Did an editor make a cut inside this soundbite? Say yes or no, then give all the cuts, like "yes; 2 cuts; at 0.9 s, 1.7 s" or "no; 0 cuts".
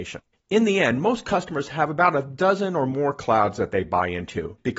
no; 0 cuts